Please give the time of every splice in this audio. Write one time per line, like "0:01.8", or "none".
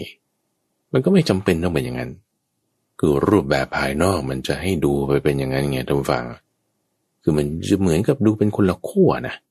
none